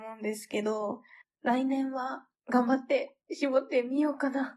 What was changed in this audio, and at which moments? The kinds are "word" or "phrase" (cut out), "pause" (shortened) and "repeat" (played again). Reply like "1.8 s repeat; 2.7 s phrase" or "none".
1.2 s pause; 2.4 s pause; 3.2 s pause